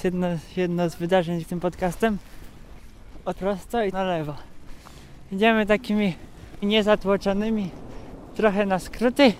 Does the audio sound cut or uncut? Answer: cut